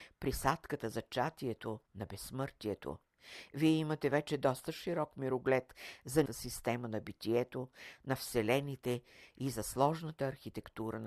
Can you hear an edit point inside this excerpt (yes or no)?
yes